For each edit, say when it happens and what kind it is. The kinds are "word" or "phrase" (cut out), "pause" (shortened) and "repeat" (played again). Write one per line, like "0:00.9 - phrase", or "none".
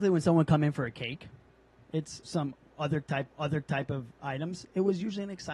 0:02.2 - word
0:03.3 - repeat

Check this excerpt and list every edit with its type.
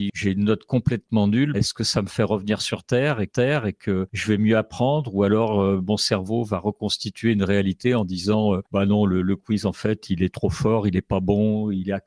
0:01.5 - word
0:03.3 - repeat

